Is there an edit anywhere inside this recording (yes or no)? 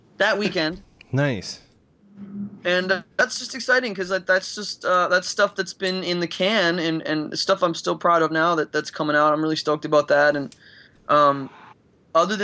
yes